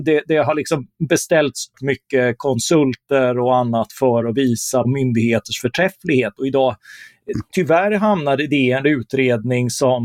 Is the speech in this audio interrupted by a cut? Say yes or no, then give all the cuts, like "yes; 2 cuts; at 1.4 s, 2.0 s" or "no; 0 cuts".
yes; 2 cuts; at 1.7 s, 4.8 s